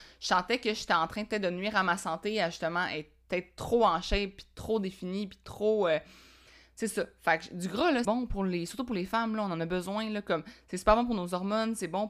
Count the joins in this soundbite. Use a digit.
1